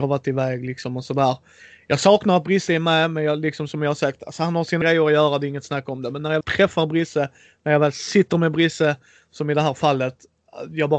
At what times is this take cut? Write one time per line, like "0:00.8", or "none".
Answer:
0:02.7
0:04.8
0:06.4